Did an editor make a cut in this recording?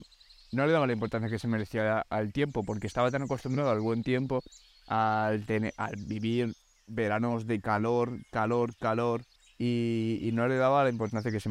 yes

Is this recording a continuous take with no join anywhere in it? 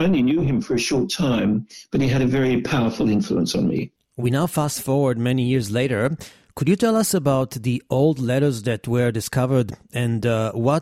yes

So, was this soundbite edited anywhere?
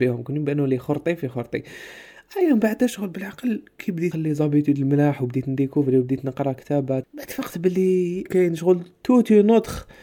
yes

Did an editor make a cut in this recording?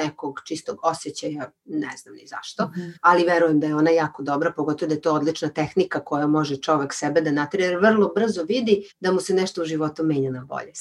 yes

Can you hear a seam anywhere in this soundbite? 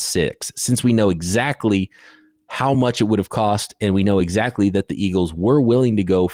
no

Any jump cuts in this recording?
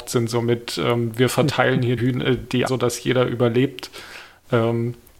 yes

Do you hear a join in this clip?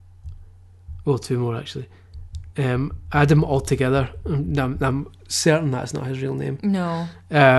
no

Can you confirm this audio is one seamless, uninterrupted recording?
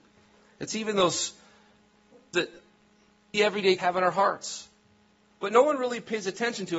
no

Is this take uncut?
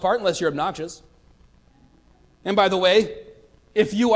yes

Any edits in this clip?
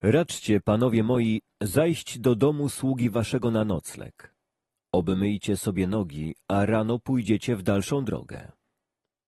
no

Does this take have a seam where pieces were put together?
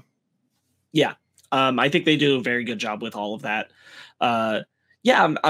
no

